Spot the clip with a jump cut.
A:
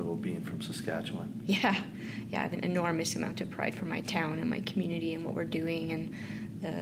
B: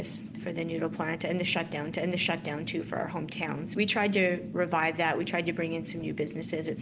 B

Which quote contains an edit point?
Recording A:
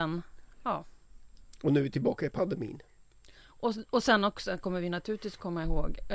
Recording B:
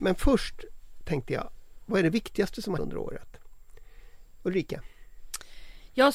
B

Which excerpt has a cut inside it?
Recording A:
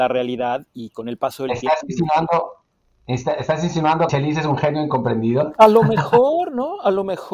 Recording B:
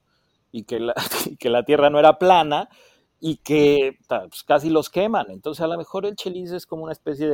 A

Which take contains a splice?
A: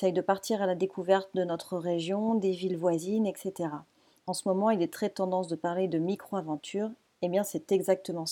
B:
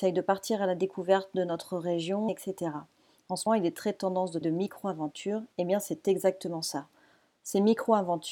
B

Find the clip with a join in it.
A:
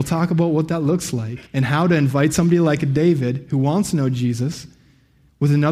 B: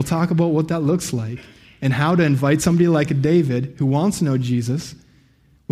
A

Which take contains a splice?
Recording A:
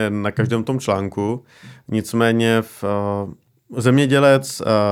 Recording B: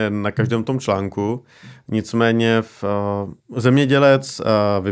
B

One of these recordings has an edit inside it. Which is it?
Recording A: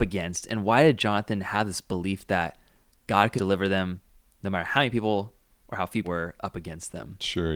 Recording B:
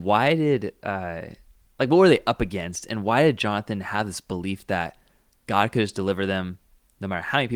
A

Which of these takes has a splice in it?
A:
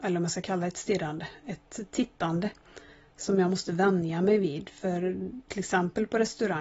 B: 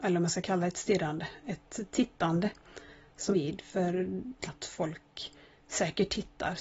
B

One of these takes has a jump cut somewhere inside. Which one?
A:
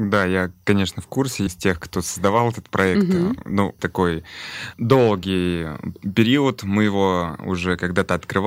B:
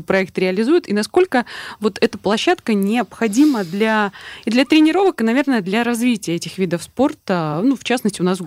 A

